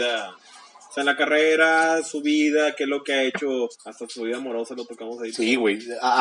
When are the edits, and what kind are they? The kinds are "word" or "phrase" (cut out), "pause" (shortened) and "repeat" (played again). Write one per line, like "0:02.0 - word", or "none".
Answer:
0:03.7 - pause